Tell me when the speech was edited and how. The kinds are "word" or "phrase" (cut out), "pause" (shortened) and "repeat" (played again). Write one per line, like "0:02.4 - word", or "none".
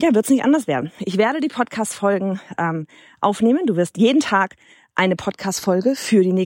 none